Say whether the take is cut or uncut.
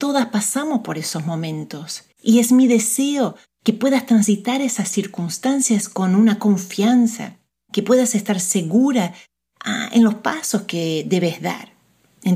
cut